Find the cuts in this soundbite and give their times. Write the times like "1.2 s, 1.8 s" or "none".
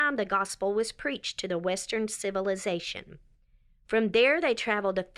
none